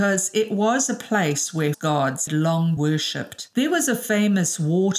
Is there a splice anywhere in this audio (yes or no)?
yes